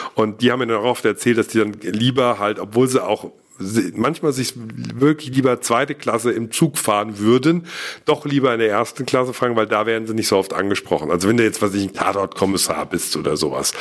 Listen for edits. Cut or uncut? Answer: uncut